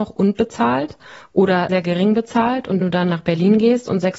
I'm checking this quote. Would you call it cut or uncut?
cut